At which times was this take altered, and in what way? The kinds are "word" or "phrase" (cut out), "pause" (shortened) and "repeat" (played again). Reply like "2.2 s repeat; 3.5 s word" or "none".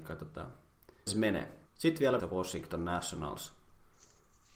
1.1 s phrase; 1.7 s pause; 2.2 s phrase